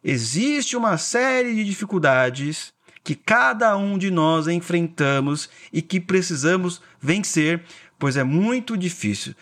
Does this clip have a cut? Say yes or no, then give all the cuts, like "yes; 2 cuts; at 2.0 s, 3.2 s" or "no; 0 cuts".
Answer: no; 0 cuts